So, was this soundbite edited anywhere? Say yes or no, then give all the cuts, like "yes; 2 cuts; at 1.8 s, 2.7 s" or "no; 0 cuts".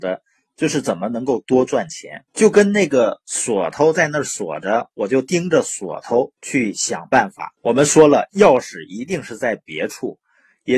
yes; 3 cuts; at 2.3 s, 6.4 s, 7.6 s